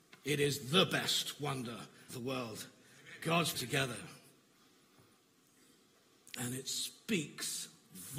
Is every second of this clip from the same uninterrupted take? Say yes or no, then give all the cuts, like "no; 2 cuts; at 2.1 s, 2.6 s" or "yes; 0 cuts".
no; 2 cuts; at 2.1 s, 3.5 s